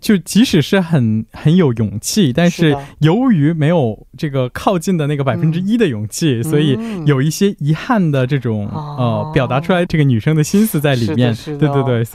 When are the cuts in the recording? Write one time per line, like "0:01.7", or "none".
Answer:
0:09.9